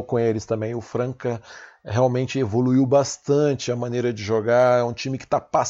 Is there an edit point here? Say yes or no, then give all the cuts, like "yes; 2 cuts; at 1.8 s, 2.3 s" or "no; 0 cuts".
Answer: no; 0 cuts